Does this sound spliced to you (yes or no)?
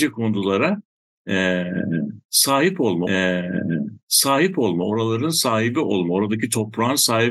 yes